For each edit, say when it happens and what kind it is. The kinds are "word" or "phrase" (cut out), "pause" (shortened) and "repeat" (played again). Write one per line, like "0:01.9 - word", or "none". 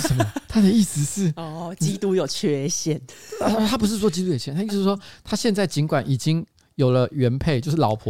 none

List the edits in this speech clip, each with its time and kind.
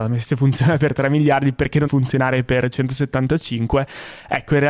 0:01.9 - word

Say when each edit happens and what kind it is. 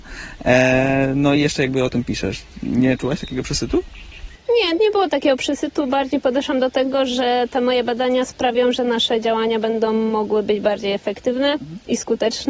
none

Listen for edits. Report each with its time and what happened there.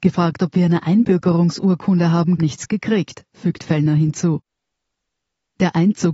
0:02.4 - phrase

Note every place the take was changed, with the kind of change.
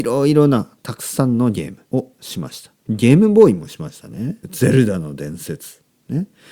0:01.8 - pause
0:02.8 - pause
0:04.4 - pause

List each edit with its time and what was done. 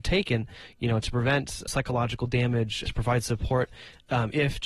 0:01.7 - word
0:02.9 - word

